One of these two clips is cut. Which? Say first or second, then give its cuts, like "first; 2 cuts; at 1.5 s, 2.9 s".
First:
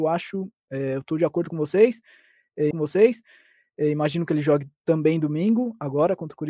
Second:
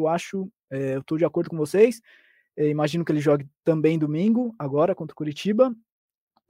first; 1 cut; at 2.7 s